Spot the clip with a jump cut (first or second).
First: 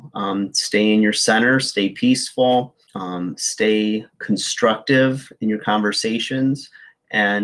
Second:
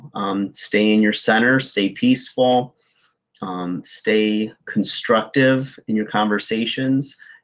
first